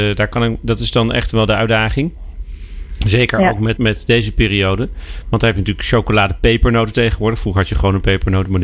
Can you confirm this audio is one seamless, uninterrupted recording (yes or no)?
no